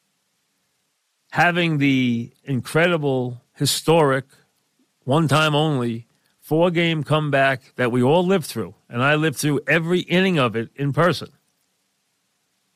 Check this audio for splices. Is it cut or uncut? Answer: uncut